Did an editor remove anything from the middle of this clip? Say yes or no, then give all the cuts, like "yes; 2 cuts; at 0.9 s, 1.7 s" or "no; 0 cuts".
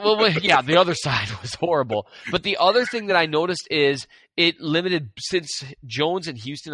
no; 0 cuts